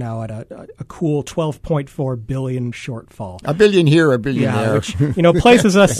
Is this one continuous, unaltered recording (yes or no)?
no